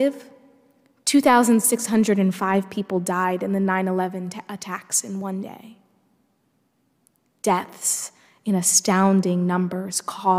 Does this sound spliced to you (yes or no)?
no